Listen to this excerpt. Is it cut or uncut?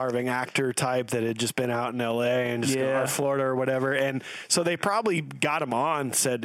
uncut